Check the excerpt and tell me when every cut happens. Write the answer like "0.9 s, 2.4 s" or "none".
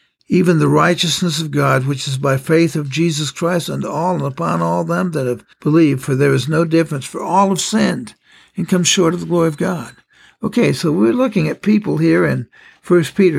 5.5 s